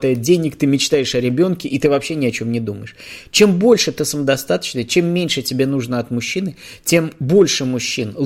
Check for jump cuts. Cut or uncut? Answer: uncut